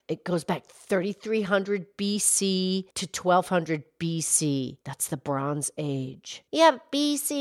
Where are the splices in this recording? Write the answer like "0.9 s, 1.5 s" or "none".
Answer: 2.9 s, 4.8 s, 6.5 s